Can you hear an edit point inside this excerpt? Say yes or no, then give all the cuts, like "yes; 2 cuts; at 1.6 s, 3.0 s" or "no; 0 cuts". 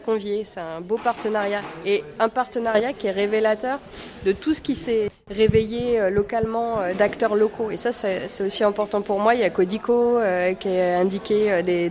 no; 0 cuts